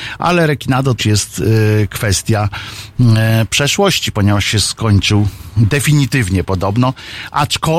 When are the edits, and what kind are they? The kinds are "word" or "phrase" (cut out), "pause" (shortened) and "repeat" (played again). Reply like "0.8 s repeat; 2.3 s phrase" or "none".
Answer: 1.0 s word